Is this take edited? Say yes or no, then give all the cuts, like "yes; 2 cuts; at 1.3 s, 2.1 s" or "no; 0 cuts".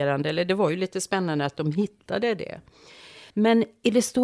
yes; 1 cut; at 3.3 s